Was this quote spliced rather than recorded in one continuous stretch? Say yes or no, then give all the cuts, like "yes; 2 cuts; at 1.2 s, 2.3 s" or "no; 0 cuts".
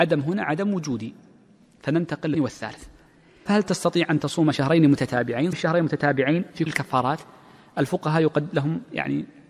yes; 4 cuts; at 2.3 s, 3.5 s, 5.5 s, 6.7 s